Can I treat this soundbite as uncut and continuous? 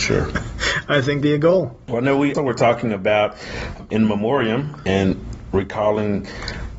no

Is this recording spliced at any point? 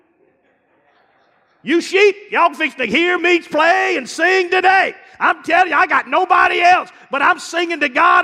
no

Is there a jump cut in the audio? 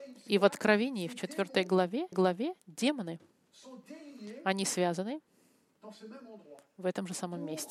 yes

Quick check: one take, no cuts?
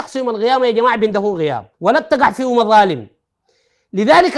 no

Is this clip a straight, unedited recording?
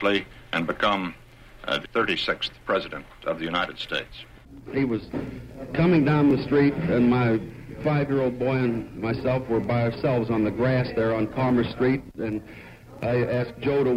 no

